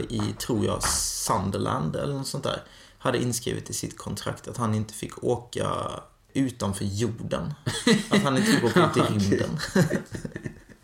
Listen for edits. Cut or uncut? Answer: uncut